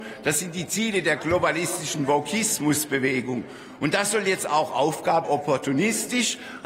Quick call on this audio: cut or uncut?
cut